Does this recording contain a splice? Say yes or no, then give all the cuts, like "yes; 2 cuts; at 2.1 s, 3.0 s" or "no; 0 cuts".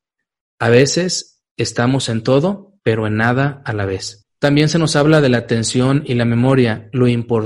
yes; 2 cuts; at 1.5 s, 2.8 s